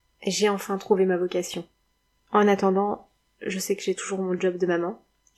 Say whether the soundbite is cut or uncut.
uncut